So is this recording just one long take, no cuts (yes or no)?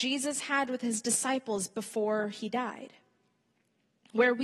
yes